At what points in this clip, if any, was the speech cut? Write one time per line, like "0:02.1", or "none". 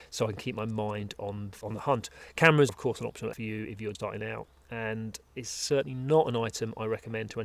0:01.6
0:02.7
0:03.3
0:03.9